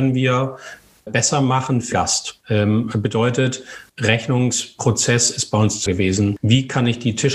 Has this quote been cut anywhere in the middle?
yes; 4 cuts; at 1.1 s, 1.9 s, 3.9 s, 5.9 s

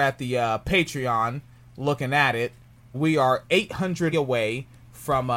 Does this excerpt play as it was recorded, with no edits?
no; 2 cuts; at 2.9 s, 4.1 s

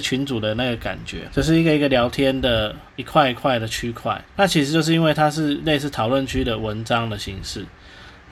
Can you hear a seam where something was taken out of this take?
yes; 3 cuts; at 1.3 s, 2.9 s, 4.3 s

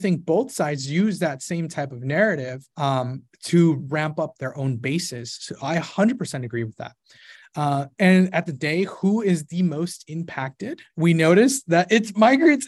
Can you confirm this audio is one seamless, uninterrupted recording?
no; 4 cuts; at 2.7 s, 3.8 s, 8.5 s, 10.9 s

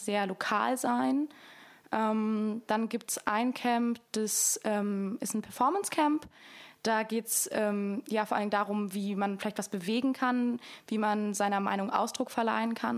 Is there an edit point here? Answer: no; 0 cuts

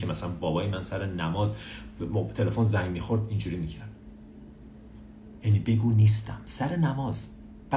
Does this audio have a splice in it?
no; 0 cuts

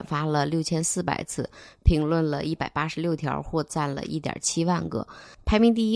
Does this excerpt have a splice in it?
no; 0 cuts

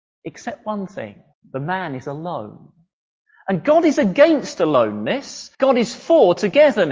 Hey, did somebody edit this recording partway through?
yes; 2 cuts; at 1.3 s, 5.5 s

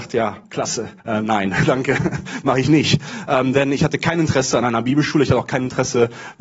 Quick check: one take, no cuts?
no; 1 cut; at 1.0 s

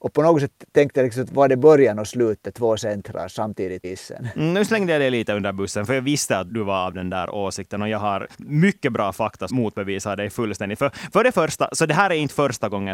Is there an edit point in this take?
yes; 4 cuts; at 3.8 s, 6.5 s, 8.3 s, 9.5 s

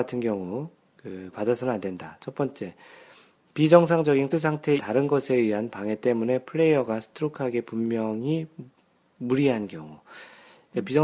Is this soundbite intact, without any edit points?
no; 3 cuts; at 1.3 s, 4.3 s, 4.8 s

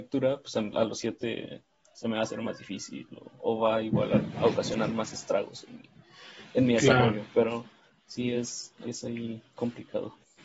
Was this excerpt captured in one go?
yes; 0 cuts

